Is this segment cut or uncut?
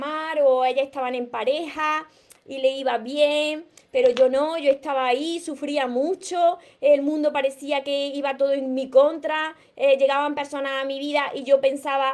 uncut